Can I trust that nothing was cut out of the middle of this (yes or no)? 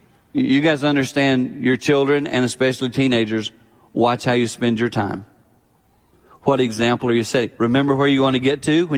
yes